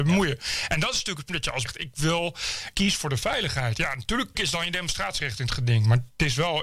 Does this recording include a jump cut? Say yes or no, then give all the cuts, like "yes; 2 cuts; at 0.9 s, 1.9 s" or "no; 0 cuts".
yes; 4 cuts; at 1.3 s, 1.7 s, 2.7 s, 4.3 s